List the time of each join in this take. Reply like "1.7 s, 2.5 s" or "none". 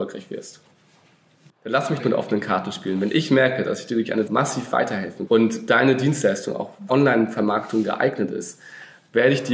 2.0 s, 4.3 s, 5.3 s, 6.9 s